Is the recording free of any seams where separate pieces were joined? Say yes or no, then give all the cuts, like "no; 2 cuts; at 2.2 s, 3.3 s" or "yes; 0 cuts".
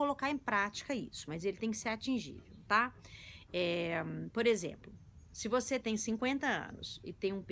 yes; 0 cuts